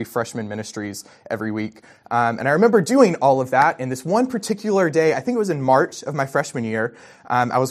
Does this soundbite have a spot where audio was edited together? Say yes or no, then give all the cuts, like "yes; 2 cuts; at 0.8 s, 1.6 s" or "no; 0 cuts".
no; 0 cuts